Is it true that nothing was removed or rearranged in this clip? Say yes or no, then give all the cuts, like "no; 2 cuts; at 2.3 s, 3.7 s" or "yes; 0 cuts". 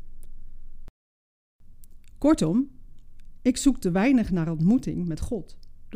yes; 0 cuts